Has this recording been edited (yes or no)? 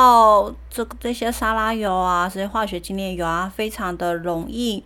yes